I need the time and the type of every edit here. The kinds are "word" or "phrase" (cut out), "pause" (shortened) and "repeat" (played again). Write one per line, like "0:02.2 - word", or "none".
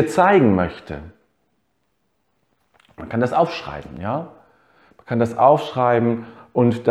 none